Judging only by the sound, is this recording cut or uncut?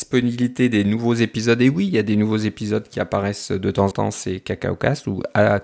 cut